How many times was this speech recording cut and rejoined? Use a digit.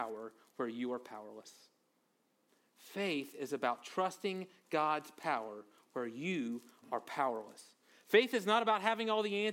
0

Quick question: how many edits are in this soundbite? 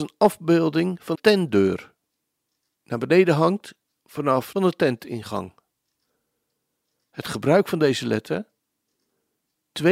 3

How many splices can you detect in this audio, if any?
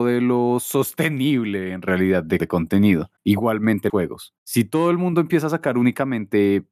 2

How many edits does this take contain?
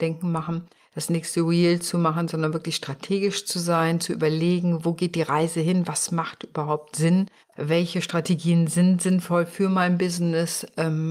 1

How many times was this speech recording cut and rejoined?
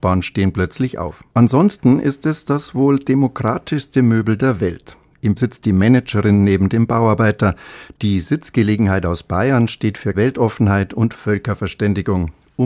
3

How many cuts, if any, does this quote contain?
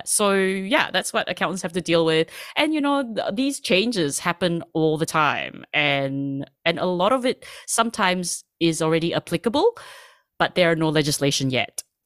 0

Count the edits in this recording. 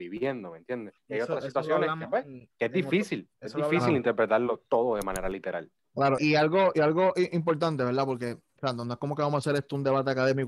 4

